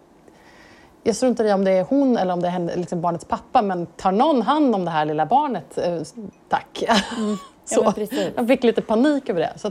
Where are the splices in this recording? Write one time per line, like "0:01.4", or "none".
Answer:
none